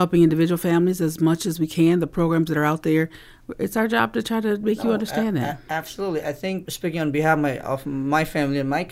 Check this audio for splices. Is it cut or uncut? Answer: cut